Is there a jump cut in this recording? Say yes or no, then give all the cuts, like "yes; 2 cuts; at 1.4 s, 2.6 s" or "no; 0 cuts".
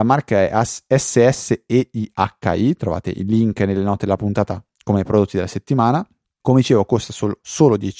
no; 0 cuts